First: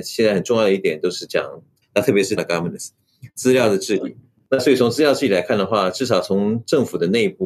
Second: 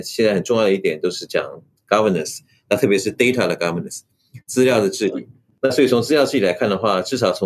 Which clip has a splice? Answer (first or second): first